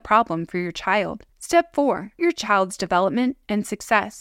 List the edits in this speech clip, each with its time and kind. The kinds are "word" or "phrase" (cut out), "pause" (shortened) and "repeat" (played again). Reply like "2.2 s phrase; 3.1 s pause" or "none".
1.3 s pause; 2.2 s word